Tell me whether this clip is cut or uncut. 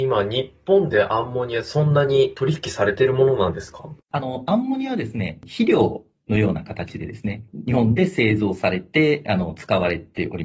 cut